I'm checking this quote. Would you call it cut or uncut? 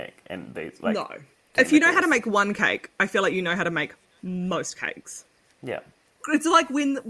uncut